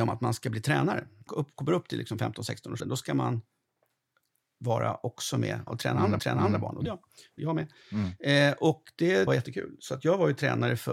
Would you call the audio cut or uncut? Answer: cut